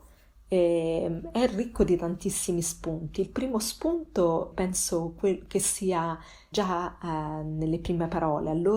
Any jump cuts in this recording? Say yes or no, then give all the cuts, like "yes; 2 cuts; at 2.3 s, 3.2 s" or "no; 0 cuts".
yes; 2 cuts; at 4.5 s, 6.5 s